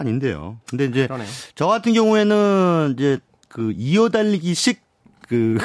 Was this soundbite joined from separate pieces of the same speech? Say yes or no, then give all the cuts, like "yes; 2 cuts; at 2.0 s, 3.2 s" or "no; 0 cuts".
no; 0 cuts